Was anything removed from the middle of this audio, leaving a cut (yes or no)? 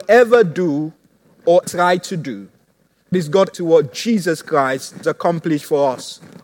yes